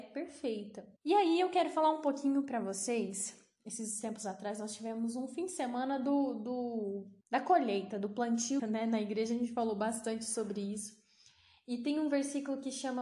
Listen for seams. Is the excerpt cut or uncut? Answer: cut